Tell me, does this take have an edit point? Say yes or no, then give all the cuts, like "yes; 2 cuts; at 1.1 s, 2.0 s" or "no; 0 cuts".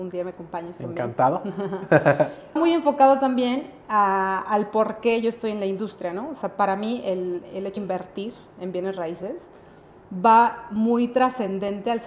yes; 2 cuts; at 2.6 s, 7.8 s